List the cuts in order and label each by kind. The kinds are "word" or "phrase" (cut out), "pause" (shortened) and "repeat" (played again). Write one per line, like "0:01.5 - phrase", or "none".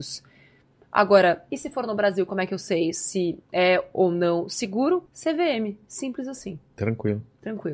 0:03.4 - pause
0:05.1 - pause